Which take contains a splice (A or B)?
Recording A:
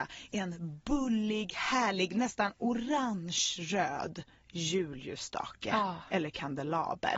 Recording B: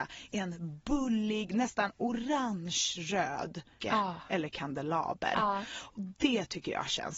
B